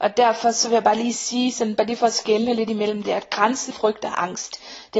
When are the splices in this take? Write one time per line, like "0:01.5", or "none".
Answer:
0:03.7